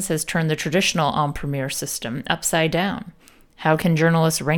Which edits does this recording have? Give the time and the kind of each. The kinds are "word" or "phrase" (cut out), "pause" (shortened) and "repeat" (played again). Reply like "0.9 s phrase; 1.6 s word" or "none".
none